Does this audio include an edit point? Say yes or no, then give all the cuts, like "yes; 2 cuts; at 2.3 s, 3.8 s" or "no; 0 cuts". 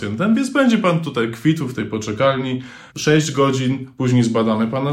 yes; 1 cut; at 2.9 s